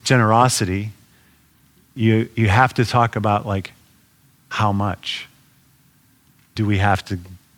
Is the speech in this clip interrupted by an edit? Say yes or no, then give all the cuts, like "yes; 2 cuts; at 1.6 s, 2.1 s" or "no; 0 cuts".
no; 0 cuts